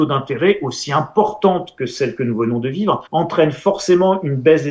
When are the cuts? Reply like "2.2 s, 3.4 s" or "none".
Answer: 3.1 s